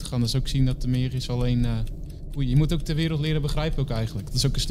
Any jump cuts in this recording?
no; 0 cuts

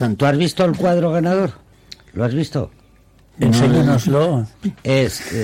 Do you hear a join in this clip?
yes; 1 cut; at 4.5 s

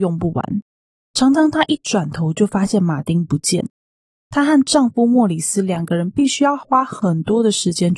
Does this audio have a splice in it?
no; 0 cuts

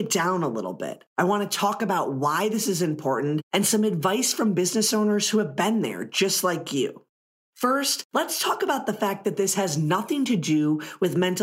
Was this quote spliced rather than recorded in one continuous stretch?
no; 0 cuts

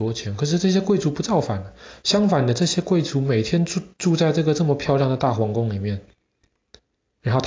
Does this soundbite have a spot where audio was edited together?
no; 0 cuts

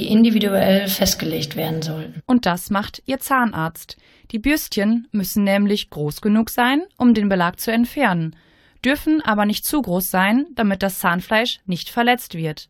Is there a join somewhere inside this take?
no; 0 cuts

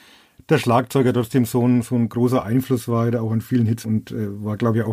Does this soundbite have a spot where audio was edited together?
yes; 1 cut; at 3.8 s

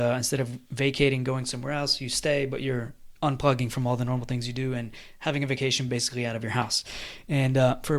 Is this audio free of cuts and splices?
yes; 0 cuts

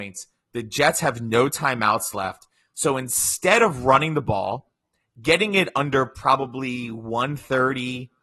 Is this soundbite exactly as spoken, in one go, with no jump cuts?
yes; 0 cuts

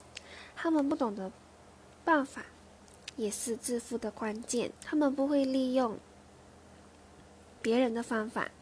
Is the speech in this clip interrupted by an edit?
yes; 1 cut; at 4.8 s

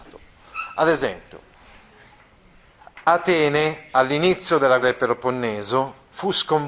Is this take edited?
yes; 2 cuts; at 3.0 s, 4.8 s

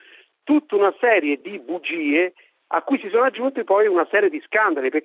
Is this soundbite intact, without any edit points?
yes; 0 cuts

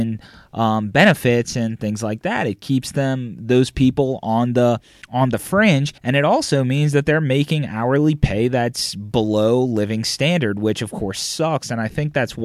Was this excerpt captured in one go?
no; 2 cuts; at 5.0 s, 6.0 s

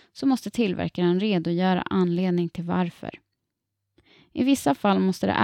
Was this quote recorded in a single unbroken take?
yes; 0 cuts

